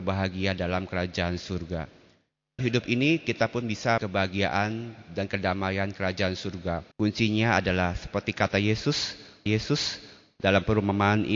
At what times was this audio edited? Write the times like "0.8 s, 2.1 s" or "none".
2.6 s, 4.0 s, 6.9 s, 9.5 s